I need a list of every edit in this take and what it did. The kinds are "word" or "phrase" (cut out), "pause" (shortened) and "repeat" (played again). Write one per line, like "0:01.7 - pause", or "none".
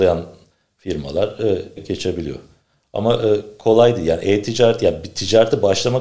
0:01.8 - phrase